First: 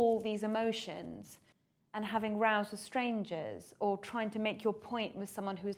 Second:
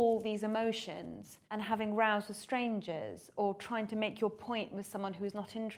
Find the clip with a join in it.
second; 1 cut; at 1.4 s

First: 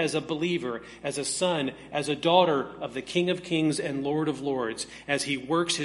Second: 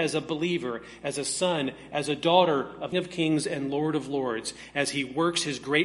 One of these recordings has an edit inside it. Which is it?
second; 1 cut; at 2.9 s

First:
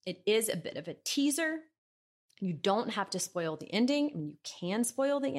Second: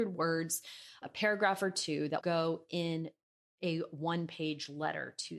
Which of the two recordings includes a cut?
second; 2 cuts; at 1.0 s, 2.2 s

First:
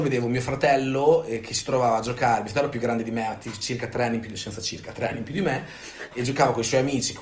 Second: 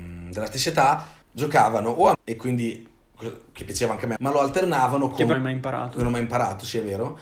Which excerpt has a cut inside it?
second; 4 cuts; at 1.2 s, 2.1 s, 4.2 s, 5.3 s

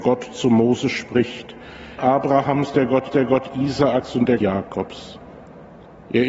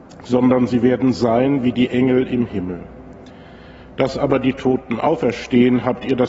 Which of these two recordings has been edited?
first; 3 cuts; at 2.0 s, 3.1 s, 4.4 s

